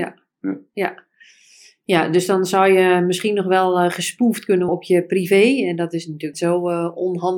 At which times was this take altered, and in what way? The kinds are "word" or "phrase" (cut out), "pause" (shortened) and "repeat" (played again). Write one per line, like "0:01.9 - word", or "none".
0:04.7 - word
0:06.3 - word